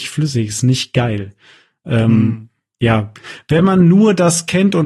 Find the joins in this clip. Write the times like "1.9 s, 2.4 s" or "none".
none